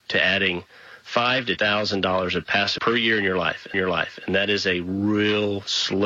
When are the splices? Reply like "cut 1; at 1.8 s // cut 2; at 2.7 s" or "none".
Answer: cut 1; at 1.6 s // cut 2; at 2.8 s // cut 3; at 3.7 s